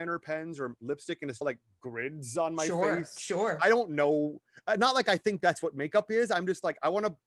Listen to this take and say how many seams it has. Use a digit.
1